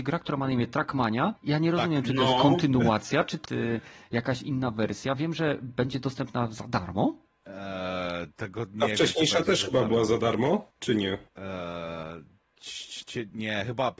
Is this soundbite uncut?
no; 5 cuts; at 1.4 s, 3.4 s, 7.3 s, 10.7 s, 11.3 s

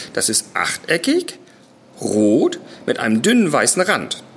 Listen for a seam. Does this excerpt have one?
no; 0 cuts

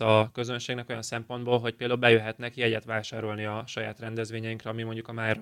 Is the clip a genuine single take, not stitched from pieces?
yes; 0 cuts

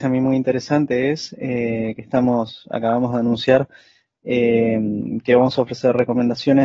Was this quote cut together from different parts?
no; 0 cuts

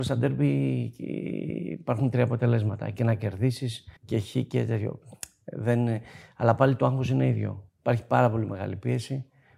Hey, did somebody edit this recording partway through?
yes; 2 cuts; at 4.0 s, 7.7 s

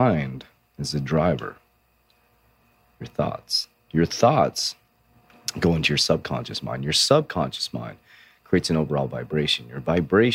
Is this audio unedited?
yes; 0 cuts

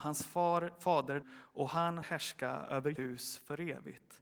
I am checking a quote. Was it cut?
yes; 3 cuts; at 1.2 s, 2.0 s, 3.0 s

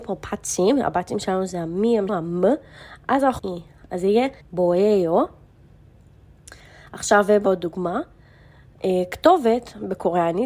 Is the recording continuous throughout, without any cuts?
no; 4 cuts; at 2.1 s, 3.4 s, 4.4 s, 7.5 s

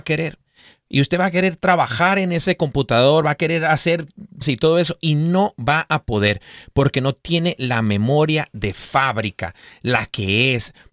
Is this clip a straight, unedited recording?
no; 1 cut; at 4.4 s

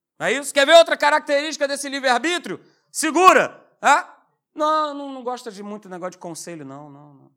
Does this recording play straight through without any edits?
yes; 0 cuts

